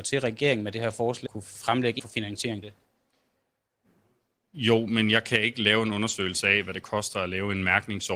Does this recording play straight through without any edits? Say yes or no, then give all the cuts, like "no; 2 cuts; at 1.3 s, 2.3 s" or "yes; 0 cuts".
no; 3 cuts; at 1.3 s, 2.0 s, 2.6 s